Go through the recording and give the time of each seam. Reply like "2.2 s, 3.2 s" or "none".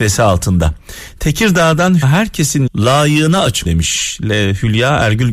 2.0 s, 2.7 s, 3.6 s